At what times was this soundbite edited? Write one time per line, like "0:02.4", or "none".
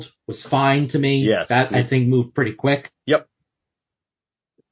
none

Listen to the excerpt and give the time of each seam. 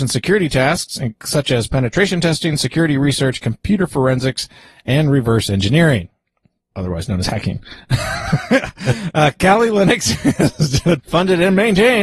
0:11.0

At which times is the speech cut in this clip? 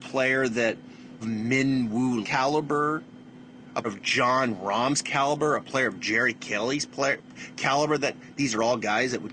0:01.2
0:02.2
0:03.8

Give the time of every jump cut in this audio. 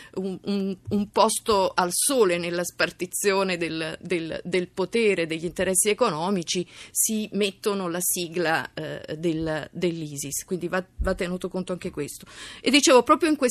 none

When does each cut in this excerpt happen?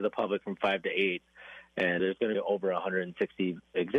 0:02.0
0:02.3

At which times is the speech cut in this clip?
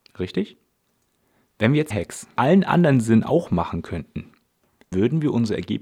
0:01.9
0:02.4
0:04.9

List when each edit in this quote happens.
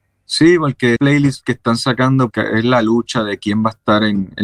0:01.0
0:02.3

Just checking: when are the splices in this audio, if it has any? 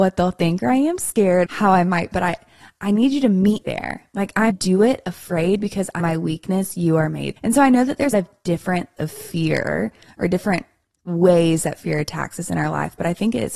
0:01.5
0:02.1
0:03.6
0:04.5
0:06.0
0:07.4
0:08.1
0:09.0

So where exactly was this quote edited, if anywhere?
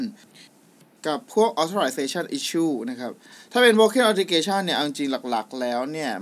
none

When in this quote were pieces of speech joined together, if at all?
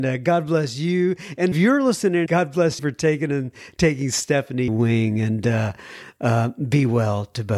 0:01.5
0:02.3
0:02.8
0:04.7

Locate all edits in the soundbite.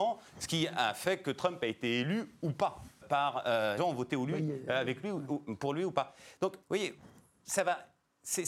0:03.0
0:03.8
0:06.6

